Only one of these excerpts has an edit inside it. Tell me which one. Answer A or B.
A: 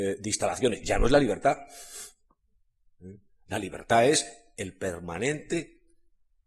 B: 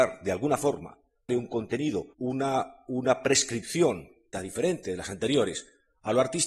B